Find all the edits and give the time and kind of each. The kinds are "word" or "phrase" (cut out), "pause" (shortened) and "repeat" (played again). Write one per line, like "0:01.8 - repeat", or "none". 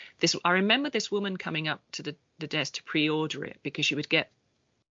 none